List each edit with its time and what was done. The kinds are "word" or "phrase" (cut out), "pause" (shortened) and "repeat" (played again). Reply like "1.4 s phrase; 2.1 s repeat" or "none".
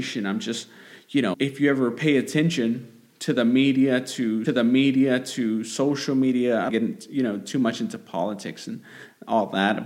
1.3 s word; 4.5 s repeat; 6.7 s phrase